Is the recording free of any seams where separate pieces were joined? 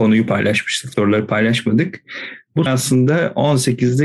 no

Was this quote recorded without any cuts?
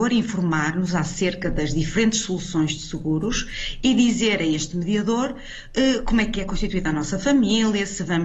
yes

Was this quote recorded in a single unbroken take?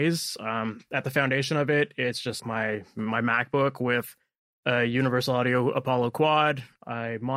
no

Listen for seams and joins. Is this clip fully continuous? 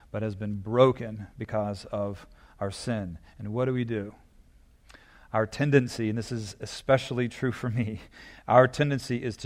yes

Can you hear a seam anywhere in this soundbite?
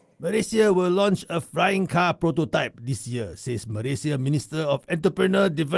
no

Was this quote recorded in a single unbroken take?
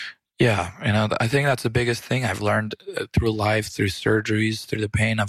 yes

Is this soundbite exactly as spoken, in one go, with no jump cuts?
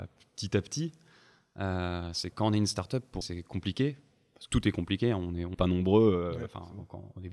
no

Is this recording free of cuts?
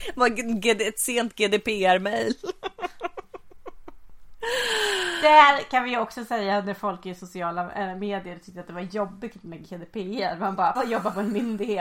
no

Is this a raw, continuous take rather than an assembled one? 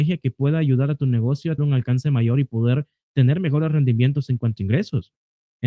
no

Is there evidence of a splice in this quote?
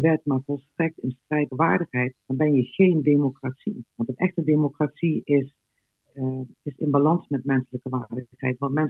yes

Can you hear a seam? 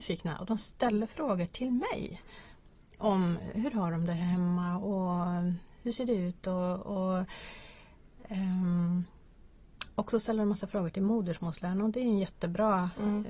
no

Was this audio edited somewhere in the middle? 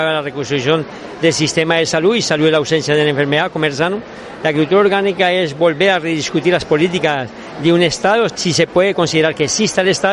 yes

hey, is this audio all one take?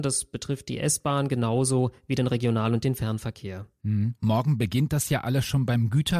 yes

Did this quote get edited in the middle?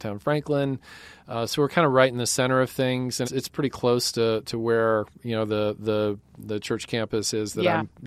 yes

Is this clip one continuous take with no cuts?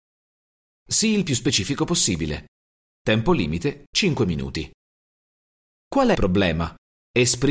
no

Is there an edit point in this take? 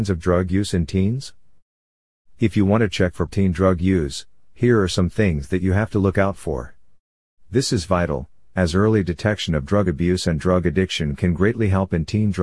yes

